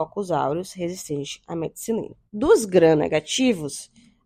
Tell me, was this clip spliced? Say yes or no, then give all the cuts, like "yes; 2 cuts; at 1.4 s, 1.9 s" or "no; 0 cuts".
yes; 1 cut; at 2.3 s